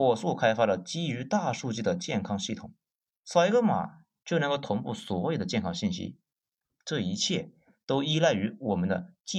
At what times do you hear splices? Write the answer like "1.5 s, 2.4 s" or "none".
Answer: none